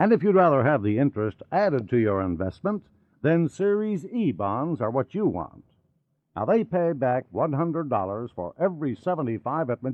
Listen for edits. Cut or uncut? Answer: uncut